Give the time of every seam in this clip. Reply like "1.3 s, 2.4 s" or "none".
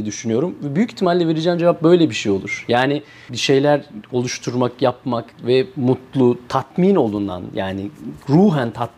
3.3 s, 5.3 s